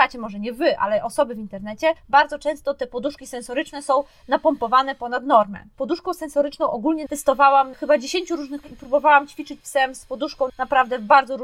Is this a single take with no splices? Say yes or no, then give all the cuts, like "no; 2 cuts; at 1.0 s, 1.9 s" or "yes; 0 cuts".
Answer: no; 5 cuts; at 7.1 s, 7.7 s, 8.6 s, 9.6 s, 10.5 s